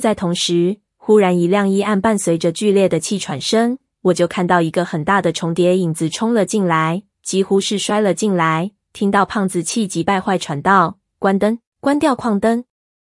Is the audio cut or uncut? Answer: cut